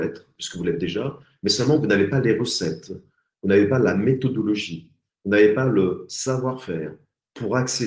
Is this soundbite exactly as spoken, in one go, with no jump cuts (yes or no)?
yes